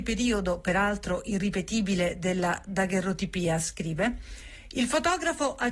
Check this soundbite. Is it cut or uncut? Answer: uncut